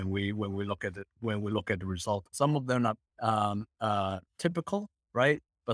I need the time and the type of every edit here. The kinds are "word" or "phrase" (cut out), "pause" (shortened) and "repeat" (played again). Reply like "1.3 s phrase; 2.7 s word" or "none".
2.3 s word; 3.1 s word; 4.2 s word